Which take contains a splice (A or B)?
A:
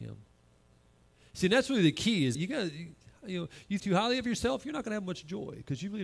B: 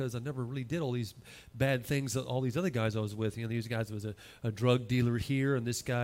A